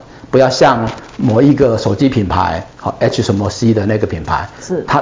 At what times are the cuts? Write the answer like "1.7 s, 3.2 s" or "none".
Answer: none